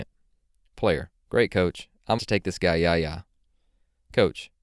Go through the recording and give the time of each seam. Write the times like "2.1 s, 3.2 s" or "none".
2.2 s